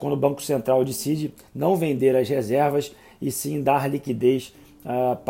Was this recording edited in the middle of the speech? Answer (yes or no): no